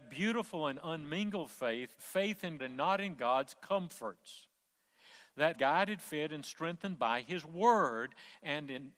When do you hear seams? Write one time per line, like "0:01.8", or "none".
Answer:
0:02.0
0:02.6
0:05.5